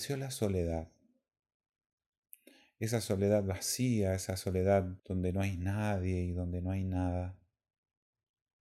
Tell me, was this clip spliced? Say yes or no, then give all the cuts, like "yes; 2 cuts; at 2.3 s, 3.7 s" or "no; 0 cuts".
yes; 1 cut; at 5.0 s